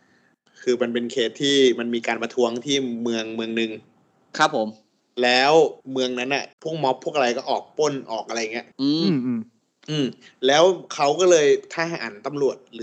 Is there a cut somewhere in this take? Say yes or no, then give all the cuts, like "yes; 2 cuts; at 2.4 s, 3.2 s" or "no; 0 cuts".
yes; 3 cuts; at 5.8 s, 6.5 s, 8.7 s